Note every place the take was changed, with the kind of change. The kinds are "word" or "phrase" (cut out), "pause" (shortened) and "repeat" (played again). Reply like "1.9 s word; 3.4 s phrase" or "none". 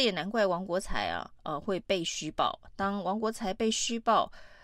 1.4 s pause